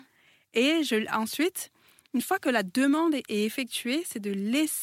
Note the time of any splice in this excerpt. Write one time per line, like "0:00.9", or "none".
none